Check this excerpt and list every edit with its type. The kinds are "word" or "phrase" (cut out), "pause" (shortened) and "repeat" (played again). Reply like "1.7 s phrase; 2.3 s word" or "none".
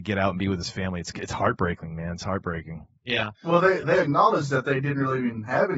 3.3 s pause